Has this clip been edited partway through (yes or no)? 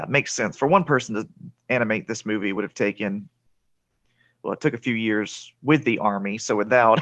no